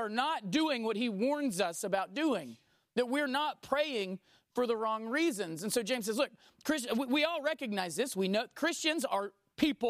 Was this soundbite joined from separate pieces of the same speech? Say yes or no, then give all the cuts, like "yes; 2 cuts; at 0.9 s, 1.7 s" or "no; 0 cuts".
no; 0 cuts